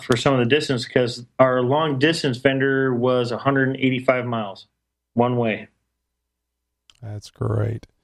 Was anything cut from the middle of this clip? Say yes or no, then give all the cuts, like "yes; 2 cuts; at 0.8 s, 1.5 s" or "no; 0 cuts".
yes; 1 cut; at 4.9 s